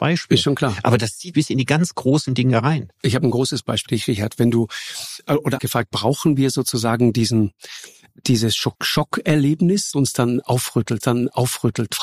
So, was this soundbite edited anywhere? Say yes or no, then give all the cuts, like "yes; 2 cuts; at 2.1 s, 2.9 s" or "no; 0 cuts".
yes; 6 cuts; at 1.3 s, 3.9 s, 5.6 s, 8.7 s, 9.9 s, 11.0 s